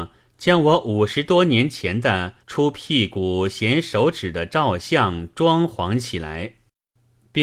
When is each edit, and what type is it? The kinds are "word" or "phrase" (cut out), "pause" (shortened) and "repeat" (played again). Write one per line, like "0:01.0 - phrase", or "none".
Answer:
0:02.4 - pause